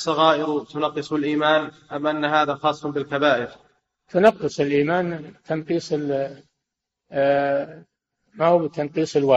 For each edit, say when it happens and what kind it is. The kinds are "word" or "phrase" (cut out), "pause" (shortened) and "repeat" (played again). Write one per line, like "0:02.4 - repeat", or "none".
none